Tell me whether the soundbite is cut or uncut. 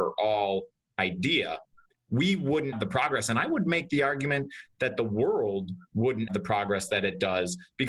cut